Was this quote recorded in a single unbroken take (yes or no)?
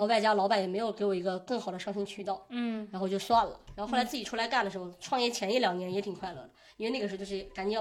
yes